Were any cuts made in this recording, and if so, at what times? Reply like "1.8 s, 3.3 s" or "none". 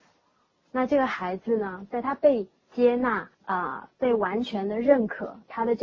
3.3 s, 3.9 s